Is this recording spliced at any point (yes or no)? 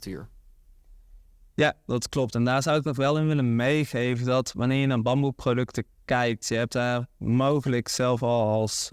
no